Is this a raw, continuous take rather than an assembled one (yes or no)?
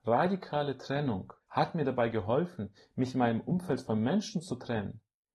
no